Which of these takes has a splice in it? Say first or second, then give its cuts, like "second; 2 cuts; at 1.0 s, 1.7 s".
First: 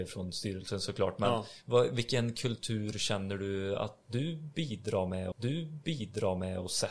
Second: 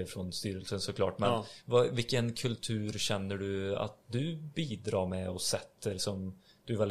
first; 1 cut; at 5.3 s